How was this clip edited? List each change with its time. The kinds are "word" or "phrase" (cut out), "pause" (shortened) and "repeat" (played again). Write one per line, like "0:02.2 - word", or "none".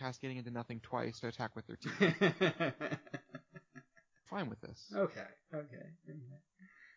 0:01.2 - word
0:04.3 - word

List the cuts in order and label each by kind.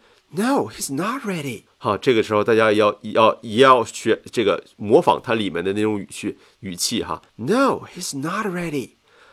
0:01.7 - pause
0:07.3 - pause

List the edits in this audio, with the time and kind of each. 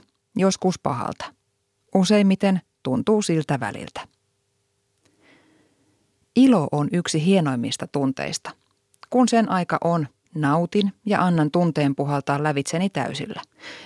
none

